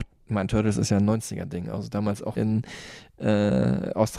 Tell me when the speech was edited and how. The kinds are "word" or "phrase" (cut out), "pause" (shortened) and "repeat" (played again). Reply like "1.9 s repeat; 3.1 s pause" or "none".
2.4 s phrase